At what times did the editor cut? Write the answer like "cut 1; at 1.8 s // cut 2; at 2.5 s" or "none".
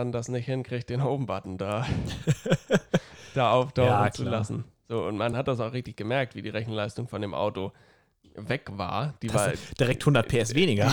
none